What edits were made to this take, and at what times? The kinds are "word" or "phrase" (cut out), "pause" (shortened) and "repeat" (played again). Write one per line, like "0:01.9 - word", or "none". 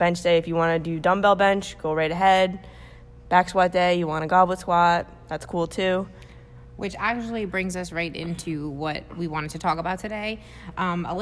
none